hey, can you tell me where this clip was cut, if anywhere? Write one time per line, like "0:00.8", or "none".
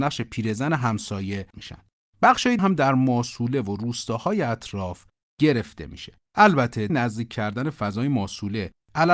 0:01.5
0:02.6
0:06.9